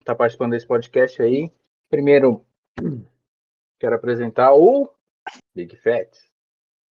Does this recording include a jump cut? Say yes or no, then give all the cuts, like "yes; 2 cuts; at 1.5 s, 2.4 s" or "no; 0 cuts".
yes; 2 cuts; at 1.7 s, 5.4 s